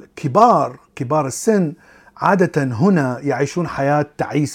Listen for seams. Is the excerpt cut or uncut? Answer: uncut